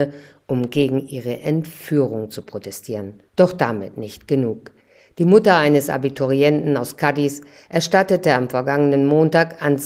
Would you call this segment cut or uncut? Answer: cut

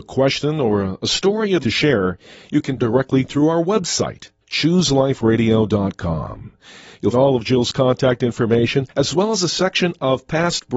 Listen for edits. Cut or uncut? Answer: cut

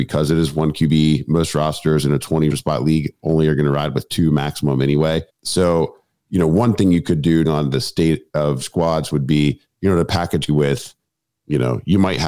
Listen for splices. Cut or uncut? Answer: cut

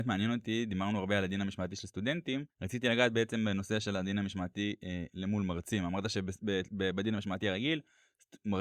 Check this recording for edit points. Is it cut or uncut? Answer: cut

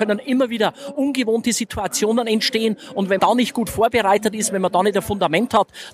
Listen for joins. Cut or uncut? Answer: cut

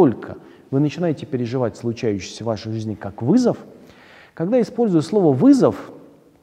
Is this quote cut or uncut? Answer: uncut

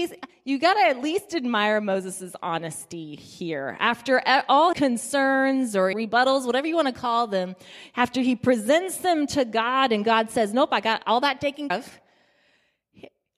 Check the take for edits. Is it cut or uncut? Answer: cut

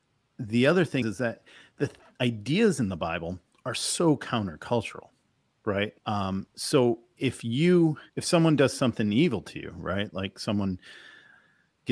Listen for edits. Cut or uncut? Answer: cut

